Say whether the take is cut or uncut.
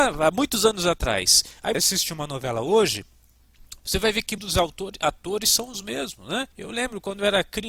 cut